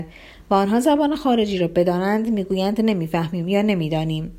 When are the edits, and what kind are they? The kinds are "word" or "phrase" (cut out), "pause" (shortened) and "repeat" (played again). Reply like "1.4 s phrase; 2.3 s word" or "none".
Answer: none